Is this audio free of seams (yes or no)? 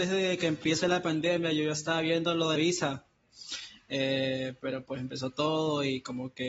no